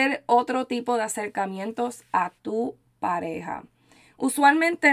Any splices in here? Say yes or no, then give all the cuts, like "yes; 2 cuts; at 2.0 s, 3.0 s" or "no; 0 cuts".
no; 0 cuts